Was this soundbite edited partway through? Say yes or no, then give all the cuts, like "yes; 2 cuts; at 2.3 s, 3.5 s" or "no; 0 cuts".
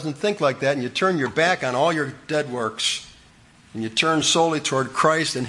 no; 0 cuts